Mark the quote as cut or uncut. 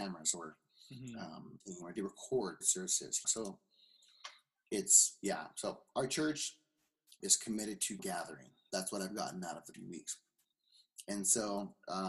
cut